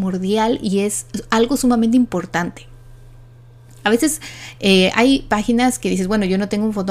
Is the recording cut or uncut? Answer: uncut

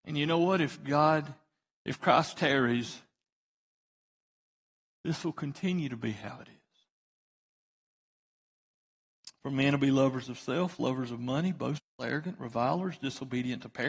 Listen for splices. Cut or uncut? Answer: uncut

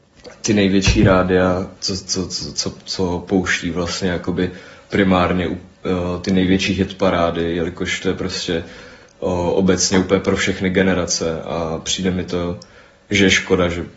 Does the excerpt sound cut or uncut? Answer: uncut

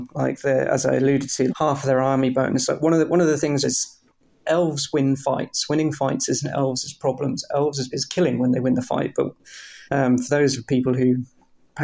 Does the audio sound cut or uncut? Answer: cut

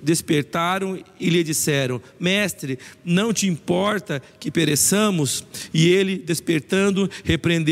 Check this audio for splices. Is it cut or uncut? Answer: uncut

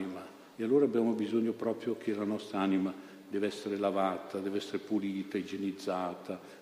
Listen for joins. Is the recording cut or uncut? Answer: uncut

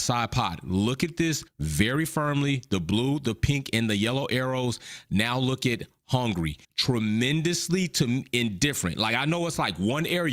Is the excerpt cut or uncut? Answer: cut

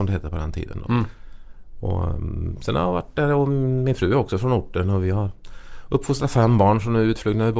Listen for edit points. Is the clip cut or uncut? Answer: uncut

